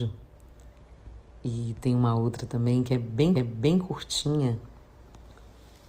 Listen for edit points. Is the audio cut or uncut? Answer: cut